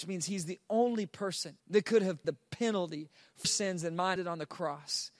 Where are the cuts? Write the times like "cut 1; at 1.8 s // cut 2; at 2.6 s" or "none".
cut 1; at 1.6 s // cut 2; at 2.2 s // cut 3; at 3.4 s // cut 4; at 4.2 s